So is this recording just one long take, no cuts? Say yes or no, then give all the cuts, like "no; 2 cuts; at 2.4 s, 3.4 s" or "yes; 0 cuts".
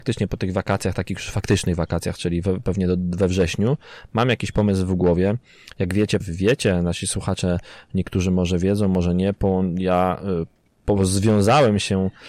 no; 1 cut; at 6.2 s